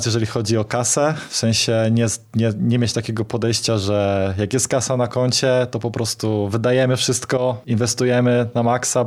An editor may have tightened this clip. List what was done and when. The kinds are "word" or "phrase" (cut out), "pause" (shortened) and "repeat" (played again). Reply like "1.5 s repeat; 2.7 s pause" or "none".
none